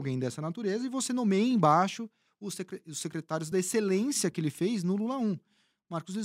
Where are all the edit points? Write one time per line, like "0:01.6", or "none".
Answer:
none